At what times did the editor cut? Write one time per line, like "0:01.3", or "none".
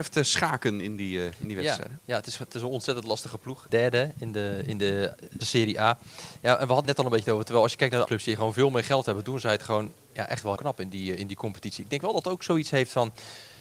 0:03.7
0:05.4
0:06.8
0:08.0
0:10.6
0:12.2